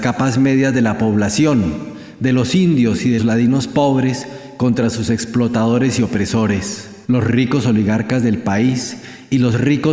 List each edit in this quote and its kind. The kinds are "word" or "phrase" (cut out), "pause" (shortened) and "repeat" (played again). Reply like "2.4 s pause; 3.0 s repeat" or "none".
3.2 s word; 7.0 s pause